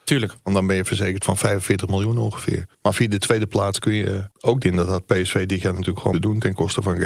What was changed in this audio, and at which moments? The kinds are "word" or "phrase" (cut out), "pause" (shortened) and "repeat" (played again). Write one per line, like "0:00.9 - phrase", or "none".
0:02.7 - pause
0:04.3 - pause
0:04.6 - phrase
0:06.1 - word